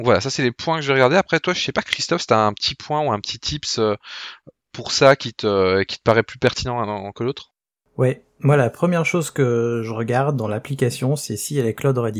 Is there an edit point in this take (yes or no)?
no